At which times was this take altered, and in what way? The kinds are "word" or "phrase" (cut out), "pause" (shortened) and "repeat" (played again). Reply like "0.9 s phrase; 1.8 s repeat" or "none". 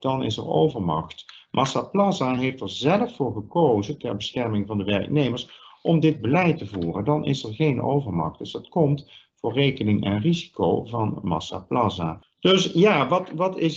none